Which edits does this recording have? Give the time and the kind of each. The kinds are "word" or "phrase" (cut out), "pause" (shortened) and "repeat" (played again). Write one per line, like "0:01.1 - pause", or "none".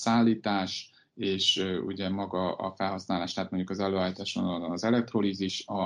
none